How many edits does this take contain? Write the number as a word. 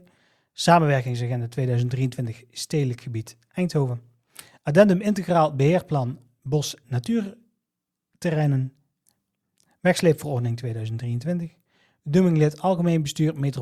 one